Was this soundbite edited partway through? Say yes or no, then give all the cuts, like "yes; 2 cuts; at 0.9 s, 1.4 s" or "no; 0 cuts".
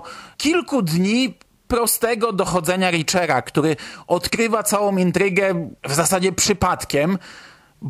no; 0 cuts